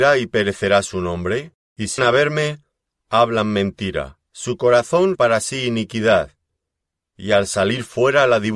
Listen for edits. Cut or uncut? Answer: cut